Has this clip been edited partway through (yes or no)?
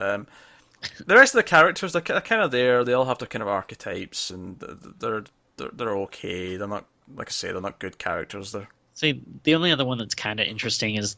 no